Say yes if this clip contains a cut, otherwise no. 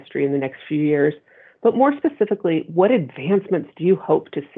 no